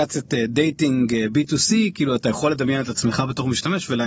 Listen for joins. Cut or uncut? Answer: uncut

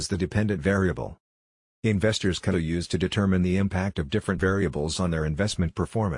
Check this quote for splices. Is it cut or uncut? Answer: cut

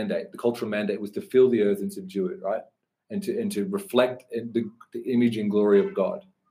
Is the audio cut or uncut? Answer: uncut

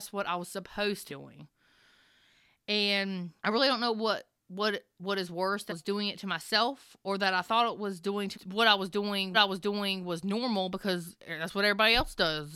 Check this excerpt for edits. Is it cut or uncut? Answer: cut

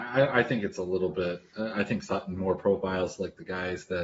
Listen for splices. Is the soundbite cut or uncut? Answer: cut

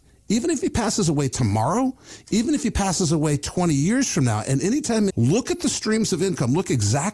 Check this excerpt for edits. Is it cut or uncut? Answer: cut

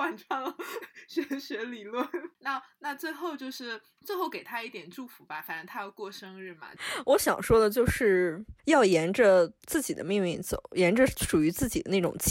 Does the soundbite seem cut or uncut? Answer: cut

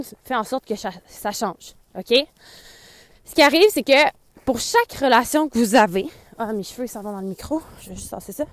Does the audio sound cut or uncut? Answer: uncut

